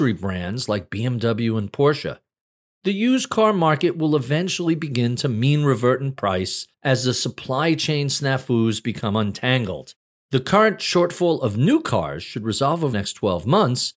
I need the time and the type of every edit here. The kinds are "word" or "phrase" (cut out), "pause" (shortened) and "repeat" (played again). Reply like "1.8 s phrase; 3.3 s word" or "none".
12.9 s word

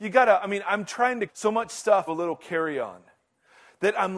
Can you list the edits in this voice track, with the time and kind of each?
1.3 s word; 2.1 s word

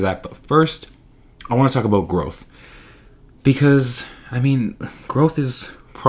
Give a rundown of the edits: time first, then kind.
none

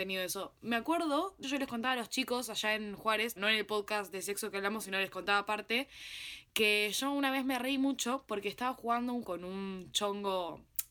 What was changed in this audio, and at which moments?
1.4 s word; 3.4 s word; 9.2 s word

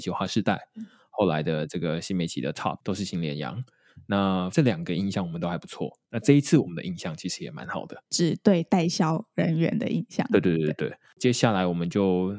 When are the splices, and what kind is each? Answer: 8.1 s word

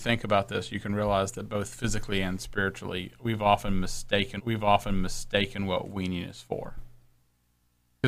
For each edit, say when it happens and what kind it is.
4.4 s repeat

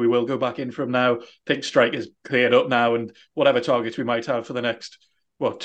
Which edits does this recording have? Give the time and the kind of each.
2.2 s pause

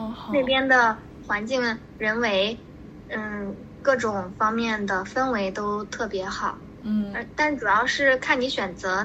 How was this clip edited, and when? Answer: none

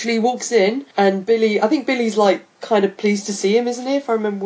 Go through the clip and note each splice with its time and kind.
0.9 s pause

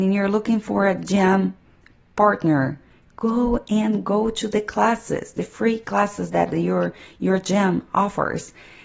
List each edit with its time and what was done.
none

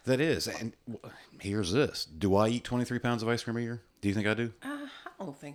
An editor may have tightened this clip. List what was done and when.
3.9 s pause

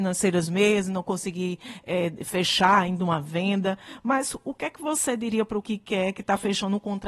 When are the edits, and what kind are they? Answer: 5.6 s word

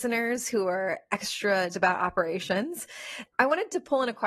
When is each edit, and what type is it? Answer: 1.7 s word; 3.2 s word

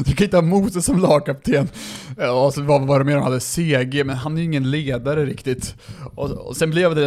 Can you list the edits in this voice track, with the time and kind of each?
none

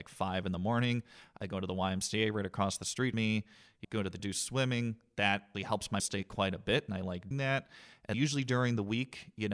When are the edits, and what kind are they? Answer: 3.1 s word; 3.8 s word; 4.2 s word; 5.5 s word; 6.0 s word; 7.3 s word; 8.1 s word

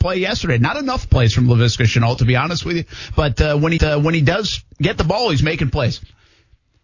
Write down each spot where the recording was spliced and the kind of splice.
3.8 s repeat

